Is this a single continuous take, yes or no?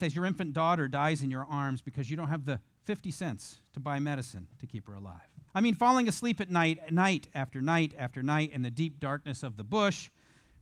no